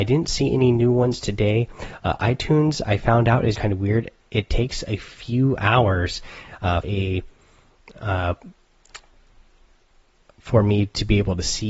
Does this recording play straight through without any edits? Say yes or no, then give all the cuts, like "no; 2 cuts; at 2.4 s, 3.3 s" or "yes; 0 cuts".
no; 2 cuts; at 3.5 s, 6.8 s